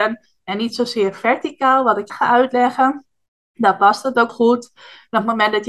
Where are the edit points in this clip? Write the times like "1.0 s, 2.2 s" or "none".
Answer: 2.1 s, 3.3 s, 4.3 s